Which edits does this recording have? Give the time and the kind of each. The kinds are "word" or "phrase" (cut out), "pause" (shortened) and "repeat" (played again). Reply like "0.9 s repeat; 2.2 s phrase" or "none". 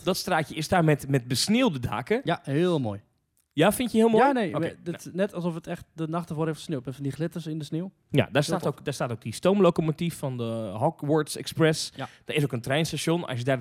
none

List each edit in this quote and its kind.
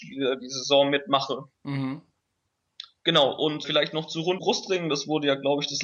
1.5 s pause; 3.6 s word; 4.4 s phrase

